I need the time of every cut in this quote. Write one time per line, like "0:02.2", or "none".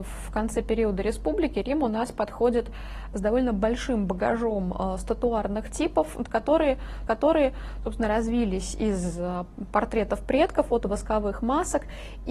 0:07.1